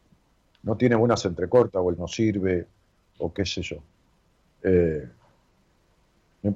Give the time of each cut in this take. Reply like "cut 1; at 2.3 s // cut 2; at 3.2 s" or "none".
cut 1; at 1.2 s // cut 2; at 2.0 s